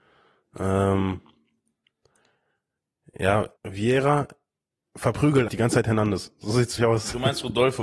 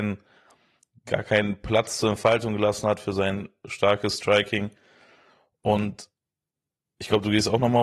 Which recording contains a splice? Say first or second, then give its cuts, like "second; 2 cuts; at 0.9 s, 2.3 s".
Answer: first; 3 cuts; at 3.6 s, 5.5 s, 6.8 s